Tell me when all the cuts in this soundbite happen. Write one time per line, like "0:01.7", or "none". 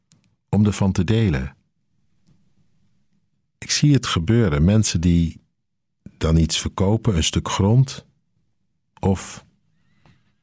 none